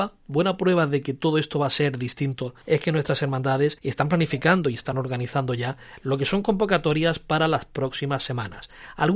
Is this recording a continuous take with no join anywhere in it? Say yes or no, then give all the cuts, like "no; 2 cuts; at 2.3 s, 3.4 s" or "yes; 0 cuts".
yes; 0 cuts